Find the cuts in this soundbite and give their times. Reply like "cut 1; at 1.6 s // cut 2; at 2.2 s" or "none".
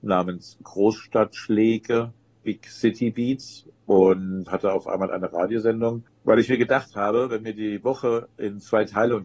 none